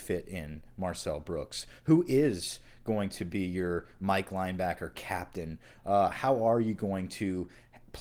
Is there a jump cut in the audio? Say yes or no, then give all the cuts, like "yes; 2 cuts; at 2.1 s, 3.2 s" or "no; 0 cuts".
no; 0 cuts